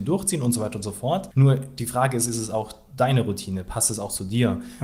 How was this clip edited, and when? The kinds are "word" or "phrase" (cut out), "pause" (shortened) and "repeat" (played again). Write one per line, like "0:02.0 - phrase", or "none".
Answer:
0:01.3 - pause